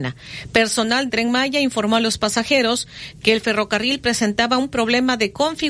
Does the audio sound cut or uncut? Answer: cut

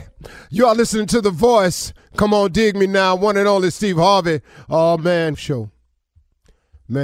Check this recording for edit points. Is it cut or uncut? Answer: cut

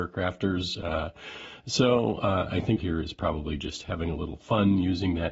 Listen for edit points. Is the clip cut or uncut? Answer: cut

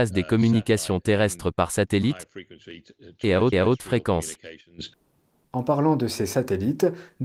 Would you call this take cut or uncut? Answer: cut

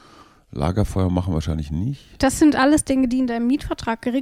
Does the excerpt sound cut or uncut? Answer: uncut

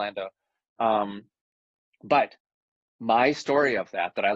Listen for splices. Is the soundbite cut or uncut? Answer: uncut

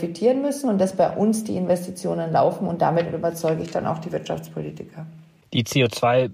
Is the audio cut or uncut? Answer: uncut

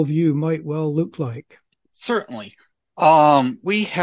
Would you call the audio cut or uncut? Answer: cut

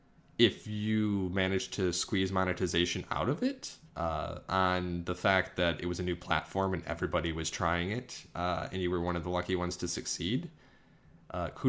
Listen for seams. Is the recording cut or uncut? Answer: cut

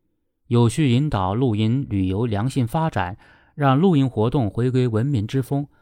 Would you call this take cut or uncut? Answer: uncut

